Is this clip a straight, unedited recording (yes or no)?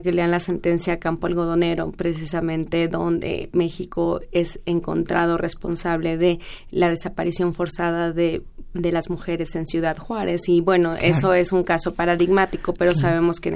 yes